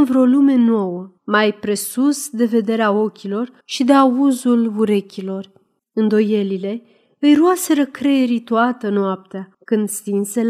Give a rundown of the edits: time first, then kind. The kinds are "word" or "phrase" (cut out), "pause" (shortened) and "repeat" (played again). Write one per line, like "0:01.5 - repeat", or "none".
0:01.2 - pause
0:03.6 - pause
0:05.8 - pause
0:09.5 - pause